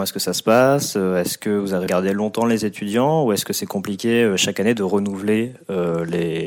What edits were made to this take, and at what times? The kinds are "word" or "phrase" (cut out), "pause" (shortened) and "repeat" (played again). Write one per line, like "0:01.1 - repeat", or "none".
0:01.9 - word